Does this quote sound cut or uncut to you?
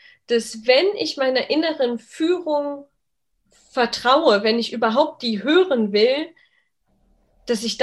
uncut